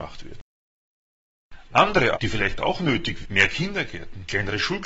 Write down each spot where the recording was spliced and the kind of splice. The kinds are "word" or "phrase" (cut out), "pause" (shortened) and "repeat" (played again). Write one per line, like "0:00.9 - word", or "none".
0:02.1 - word
0:03.2 - word